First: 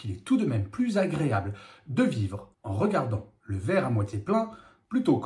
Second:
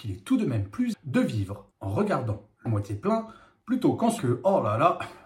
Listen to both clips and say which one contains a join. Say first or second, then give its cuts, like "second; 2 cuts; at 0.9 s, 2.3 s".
second; 3 cuts; at 0.9 s, 2.7 s, 4.2 s